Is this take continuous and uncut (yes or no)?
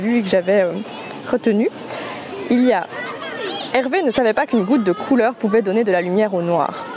yes